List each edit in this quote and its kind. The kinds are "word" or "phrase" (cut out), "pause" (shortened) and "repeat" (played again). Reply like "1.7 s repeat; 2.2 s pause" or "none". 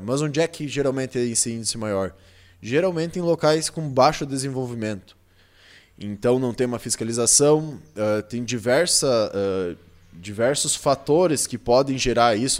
none